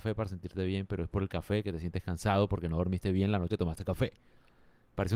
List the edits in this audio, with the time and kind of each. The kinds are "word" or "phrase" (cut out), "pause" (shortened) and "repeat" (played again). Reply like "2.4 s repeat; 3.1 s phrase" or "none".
3.5 s word